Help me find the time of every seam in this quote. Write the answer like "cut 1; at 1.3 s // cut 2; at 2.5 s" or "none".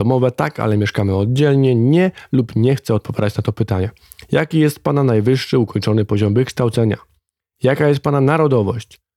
none